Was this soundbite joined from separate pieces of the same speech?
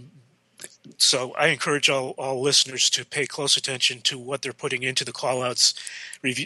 no; 0 cuts

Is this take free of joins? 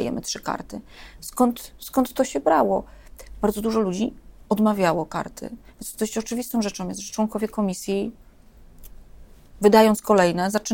yes; 0 cuts

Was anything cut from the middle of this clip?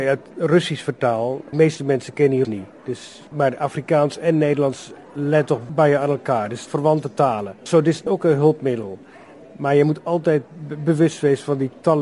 yes; 5 cuts; at 1.5 s, 2.4 s, 3.3 s, 6.7 s, 7.6 s

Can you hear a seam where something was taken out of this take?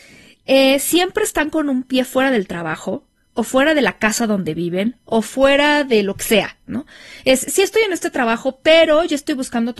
no; 0 cuts

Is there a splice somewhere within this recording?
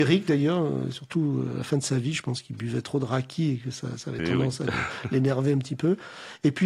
no; 0 cuts

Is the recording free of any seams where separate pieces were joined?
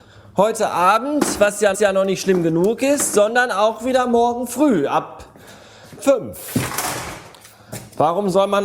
no; 2 cuts; at 1.7 s, 6.0 s

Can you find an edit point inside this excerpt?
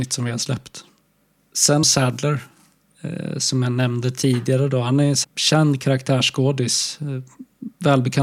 yes; 2 cuts; at 1.8 s, 5.2 s

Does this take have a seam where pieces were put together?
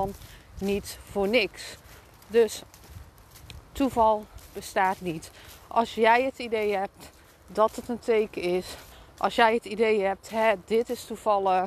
no; 0 cuts

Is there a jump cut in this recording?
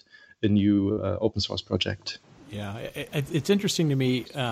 no; 0 cuts

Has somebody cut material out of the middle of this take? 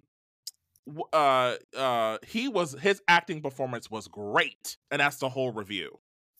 yes; 2 cuts; at 1.6 s, 4.8 s

